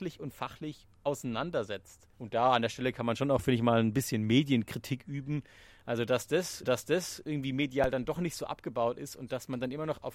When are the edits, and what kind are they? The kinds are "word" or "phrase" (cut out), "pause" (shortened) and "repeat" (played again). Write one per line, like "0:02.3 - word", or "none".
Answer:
0:02.1 - pause
0:06.6 - repeat